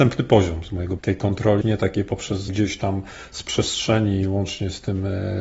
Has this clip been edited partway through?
yes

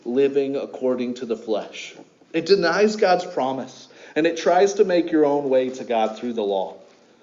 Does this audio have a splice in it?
no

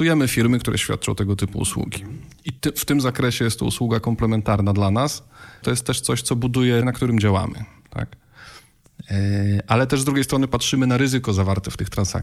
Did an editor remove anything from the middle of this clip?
yes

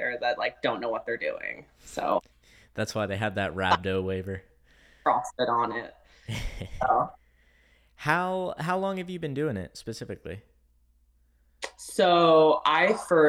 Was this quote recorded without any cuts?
yes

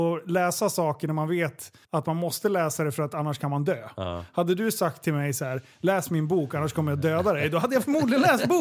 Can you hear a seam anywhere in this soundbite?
yes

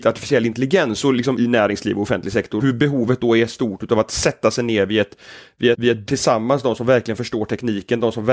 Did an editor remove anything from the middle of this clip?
yes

